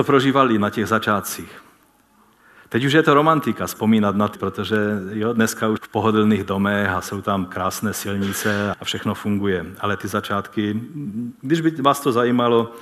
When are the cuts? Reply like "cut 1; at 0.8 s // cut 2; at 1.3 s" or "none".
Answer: cut 1; at 4.4 s // cut 2; at 5.8 s // cut 3; at 8.7 s